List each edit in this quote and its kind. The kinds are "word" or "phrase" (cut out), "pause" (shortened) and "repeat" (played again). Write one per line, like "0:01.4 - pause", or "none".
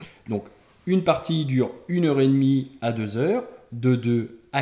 none